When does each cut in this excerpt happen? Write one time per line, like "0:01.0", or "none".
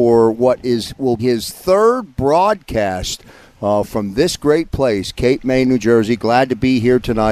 0:01.2